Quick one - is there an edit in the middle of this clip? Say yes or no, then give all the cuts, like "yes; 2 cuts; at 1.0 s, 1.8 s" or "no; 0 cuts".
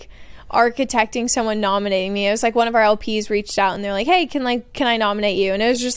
no; 0 cuts